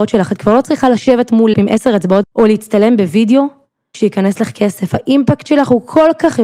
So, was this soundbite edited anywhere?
yes; 3 cuts; at 1.5 s, 2.2 s, 3.9 s

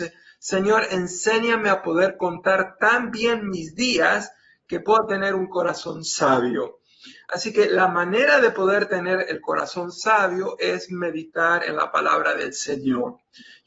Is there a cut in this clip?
no; 0 cuts

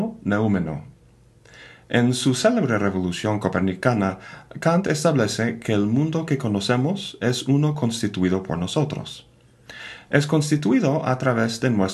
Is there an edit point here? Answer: no; 0 cuts

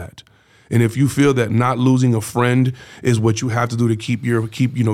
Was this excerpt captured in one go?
yes; 0 cuts

